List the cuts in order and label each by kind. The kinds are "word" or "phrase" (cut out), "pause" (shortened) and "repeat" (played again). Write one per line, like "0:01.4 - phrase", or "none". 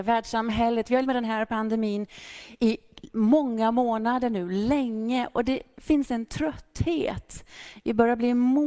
0:01.0 - word